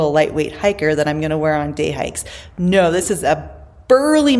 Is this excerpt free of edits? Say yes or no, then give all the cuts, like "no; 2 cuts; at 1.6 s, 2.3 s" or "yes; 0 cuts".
yes; 0 cuts